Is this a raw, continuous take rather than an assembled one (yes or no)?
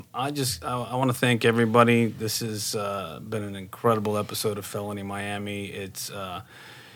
yes